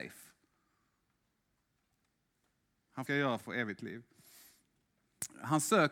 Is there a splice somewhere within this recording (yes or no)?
yes